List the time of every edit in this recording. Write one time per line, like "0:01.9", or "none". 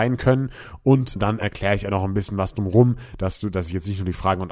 0:01.2